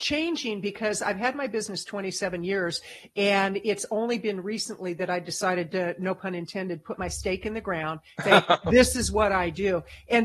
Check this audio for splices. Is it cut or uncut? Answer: cut